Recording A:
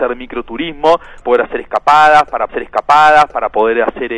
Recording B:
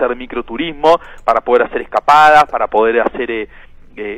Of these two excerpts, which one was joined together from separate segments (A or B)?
A